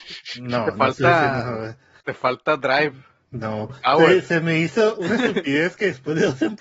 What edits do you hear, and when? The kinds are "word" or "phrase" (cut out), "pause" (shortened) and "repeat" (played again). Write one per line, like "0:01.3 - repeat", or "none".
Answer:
0:03.7 - word